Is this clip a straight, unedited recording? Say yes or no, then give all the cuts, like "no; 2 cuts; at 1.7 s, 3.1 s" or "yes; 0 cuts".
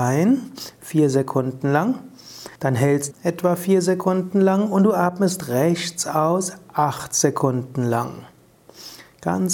no; 2 cuts; at 2.6 s, 3.1 s